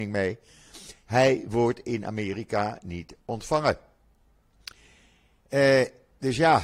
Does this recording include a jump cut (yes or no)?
no